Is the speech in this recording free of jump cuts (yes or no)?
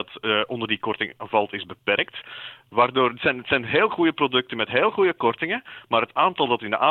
yes